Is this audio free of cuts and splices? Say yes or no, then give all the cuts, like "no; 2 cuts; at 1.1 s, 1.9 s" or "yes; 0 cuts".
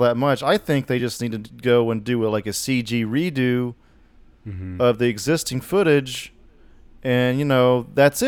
yes; 0 cuts